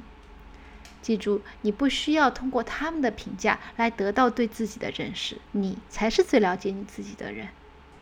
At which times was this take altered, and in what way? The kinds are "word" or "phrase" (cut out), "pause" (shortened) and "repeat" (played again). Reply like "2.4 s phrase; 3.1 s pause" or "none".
5.4 s pause